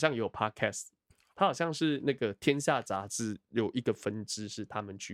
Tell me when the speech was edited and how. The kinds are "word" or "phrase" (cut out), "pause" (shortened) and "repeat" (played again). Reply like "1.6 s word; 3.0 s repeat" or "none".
1.3 s word